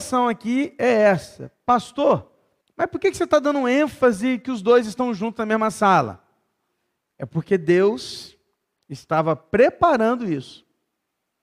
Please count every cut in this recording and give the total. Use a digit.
1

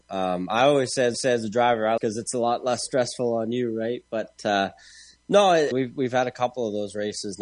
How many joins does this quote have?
3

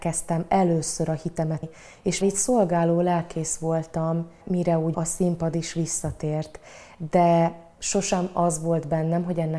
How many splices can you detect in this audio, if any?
4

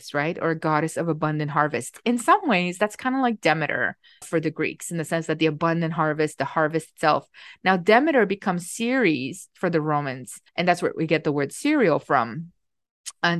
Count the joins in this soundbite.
2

